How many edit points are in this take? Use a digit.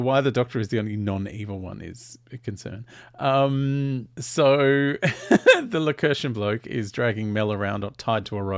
1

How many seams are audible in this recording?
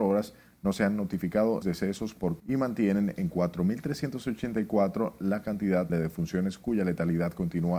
3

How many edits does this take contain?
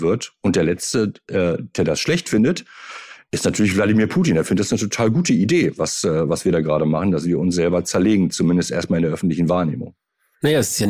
0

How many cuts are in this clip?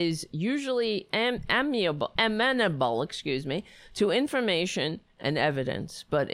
1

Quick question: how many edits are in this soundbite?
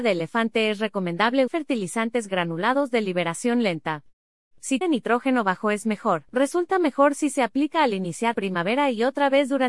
4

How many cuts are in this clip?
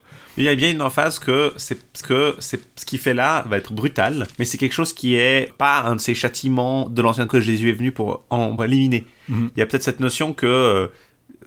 5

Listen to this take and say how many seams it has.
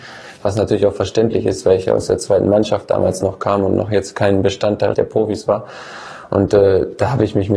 1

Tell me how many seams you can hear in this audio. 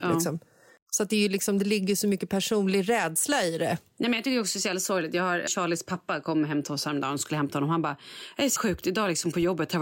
2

